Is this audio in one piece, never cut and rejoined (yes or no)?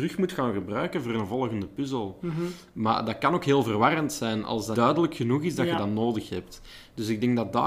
no